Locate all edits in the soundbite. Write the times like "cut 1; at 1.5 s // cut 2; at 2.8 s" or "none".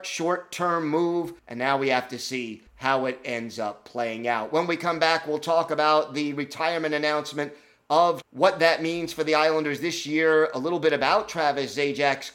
cut 1; at 1.4 s // cut 2; at 2.7 s // cut 3; at 8.2 s